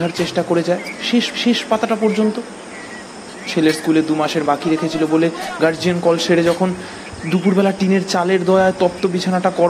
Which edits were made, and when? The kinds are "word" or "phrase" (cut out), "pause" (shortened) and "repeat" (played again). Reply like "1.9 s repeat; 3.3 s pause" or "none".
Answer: 1.3 s repeat; 4.5 s word